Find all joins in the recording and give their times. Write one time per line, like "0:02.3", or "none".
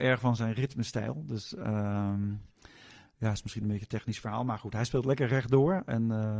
none